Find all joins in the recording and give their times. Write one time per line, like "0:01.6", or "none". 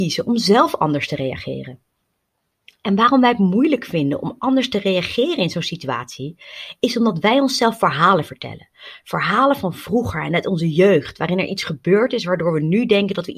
none